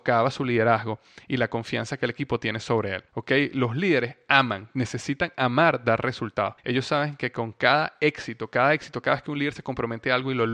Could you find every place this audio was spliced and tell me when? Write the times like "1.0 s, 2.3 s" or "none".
3.1 s, 6.6 s

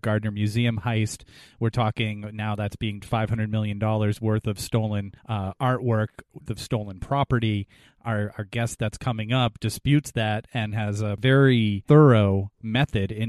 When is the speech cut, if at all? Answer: 3.0 s, 5.2 s, 6.5 s

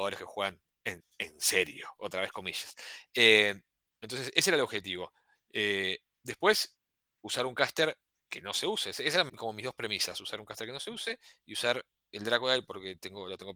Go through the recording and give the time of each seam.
9.3 s

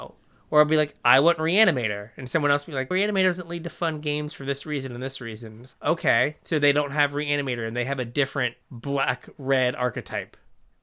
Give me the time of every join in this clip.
2.9 s, 5.7 s, 8.6 s

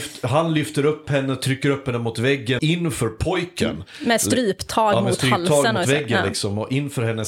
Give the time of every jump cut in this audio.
2.6 s

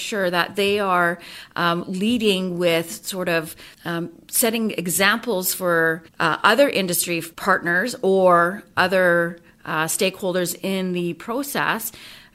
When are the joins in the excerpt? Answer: 3.7 s, 6.1 s, 7.3 s

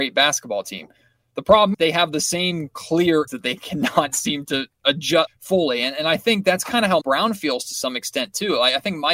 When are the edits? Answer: 1.7 s, 3.3 s, 5.3 s, 7.0 s

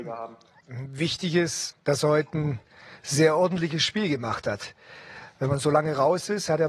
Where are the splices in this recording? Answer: 1.7 s

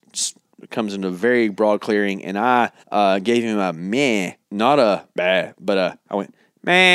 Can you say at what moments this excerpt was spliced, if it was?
2.8 s, 4.4 s, 5.1 s

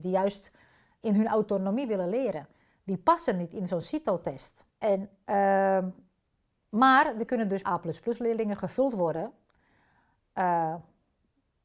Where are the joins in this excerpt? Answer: 4.7 s, 7.3 s, 7.6 s

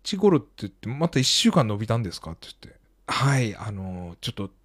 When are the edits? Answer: none

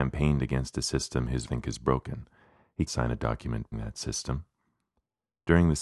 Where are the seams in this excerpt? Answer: 1.5 s, 2.9 s, 3.7 s

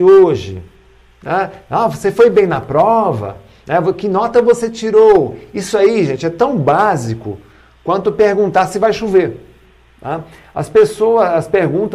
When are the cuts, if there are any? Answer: none

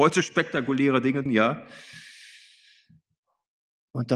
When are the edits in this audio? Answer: 1.3 s

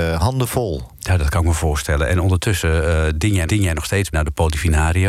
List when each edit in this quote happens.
3.5 s, 4.1 s

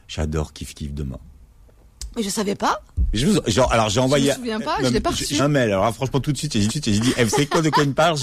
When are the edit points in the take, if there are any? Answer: 5.4 s, 6.7 s

